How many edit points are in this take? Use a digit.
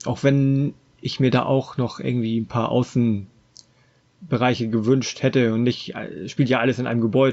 0